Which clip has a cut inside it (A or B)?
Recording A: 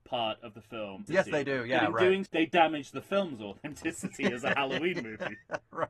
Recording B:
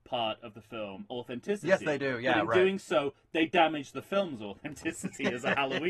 A